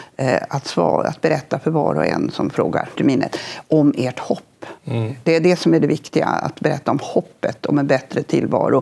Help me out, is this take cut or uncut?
cut